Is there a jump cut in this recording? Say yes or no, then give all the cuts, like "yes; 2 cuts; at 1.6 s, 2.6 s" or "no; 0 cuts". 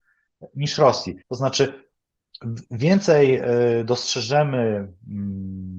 yes; 1 cut; at 1.2 s